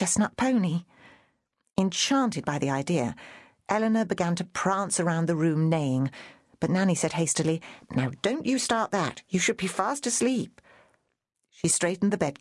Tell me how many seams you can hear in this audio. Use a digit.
0